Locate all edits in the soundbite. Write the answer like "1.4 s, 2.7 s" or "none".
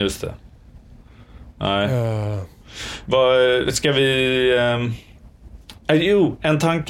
5.8 s